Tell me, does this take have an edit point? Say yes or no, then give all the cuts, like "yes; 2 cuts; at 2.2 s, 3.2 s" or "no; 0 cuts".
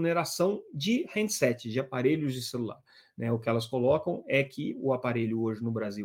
no; 0 cuts